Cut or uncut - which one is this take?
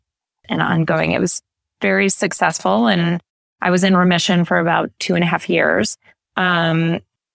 cut